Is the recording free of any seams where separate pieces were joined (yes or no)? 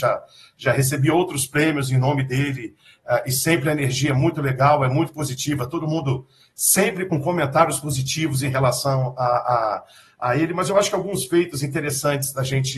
yes